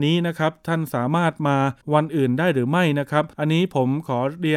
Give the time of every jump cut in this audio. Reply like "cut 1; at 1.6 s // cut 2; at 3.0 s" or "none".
cut 1; at 1.8 s // cut 2; at 3.3 s